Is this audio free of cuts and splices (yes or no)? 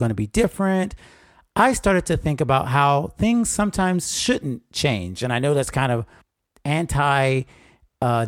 yes